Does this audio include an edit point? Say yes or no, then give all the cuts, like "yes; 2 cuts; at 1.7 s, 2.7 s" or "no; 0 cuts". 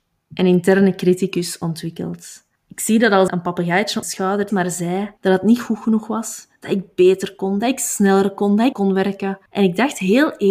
yes; 7 cuts; at 2.6 s, 3.3 s, 4.0 s, 4.5 s, 5.2 s, 8.7 s, 9.5 s